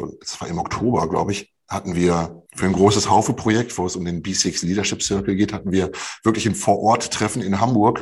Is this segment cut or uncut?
cut